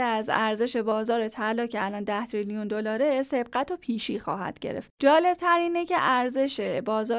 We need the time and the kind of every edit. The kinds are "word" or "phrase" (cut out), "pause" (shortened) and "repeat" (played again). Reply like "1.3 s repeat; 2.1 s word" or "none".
none